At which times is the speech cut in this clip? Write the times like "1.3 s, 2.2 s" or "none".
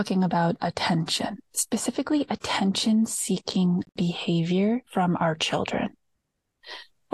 1.5 s, 4.9 s